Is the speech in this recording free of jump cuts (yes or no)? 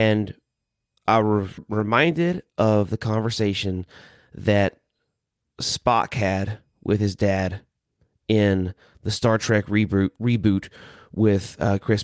no